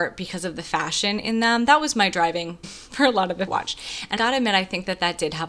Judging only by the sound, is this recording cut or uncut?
cut